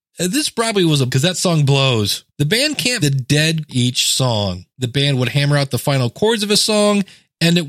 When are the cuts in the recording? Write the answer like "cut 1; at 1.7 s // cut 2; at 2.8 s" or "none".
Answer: cut 1; at 1.1 s // cut 2; at 2.3 s // cut 3; at 3.0 s // cut 4; at 3.7 s // cut 5; at 4.7 s